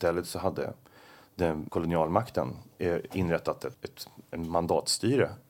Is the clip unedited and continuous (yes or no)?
no